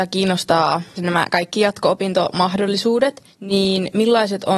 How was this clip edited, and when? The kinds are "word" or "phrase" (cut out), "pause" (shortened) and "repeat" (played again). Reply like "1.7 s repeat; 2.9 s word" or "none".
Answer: 1.0 s phrase; 3.3 s pause